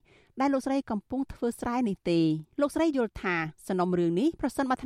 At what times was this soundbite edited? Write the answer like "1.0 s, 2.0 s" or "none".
2.5 s, 3.6 s